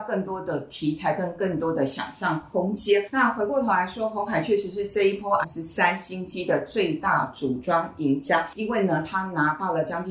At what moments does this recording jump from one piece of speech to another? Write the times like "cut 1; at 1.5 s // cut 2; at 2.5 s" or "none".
cut 1; at 5.4 s